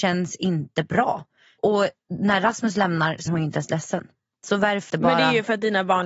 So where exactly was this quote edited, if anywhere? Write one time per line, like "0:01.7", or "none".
0:03.3
0:04.9